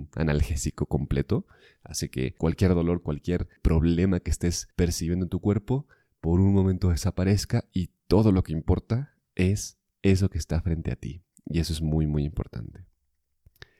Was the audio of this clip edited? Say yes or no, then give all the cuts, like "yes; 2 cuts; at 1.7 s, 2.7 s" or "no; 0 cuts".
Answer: yes; 1 cut; at 4.7 s